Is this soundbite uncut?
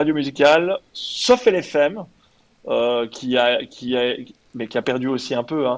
yes; 0 cuts

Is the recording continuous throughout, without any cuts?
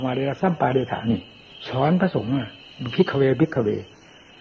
yes; 0 cuts

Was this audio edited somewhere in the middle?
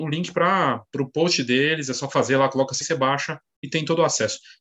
yes; 1 cut; at 2.8 s

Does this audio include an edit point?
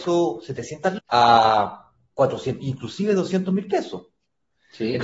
yes; 2 cuts; at 1.0 s, 2.6 s

